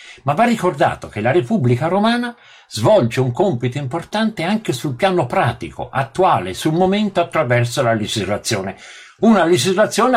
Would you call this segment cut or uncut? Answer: uncut